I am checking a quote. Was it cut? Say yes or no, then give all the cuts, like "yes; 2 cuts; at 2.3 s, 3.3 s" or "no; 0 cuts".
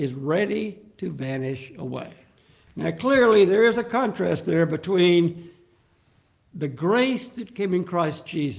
no; 0 cuts